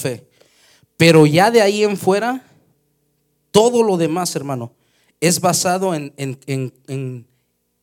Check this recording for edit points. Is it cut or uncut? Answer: uncut